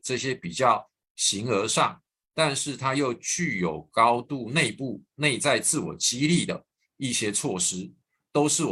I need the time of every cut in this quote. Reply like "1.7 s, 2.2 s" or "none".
none